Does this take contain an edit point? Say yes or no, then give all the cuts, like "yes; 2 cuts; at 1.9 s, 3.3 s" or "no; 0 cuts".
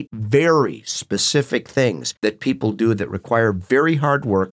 no; 0 cuts